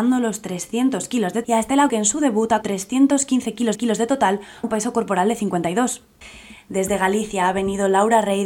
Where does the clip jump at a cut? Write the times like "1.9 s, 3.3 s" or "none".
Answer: 1.4 s, 1.9 s, 2.6 s, 3.7 s, 4.6 s